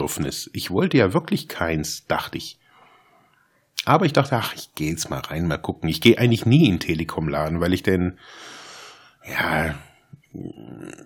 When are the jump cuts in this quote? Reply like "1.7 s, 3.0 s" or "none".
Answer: none